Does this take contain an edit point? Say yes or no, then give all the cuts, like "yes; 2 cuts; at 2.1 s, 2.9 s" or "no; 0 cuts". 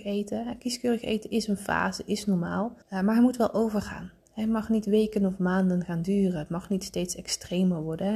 yes; 1 cut; at 2.8 s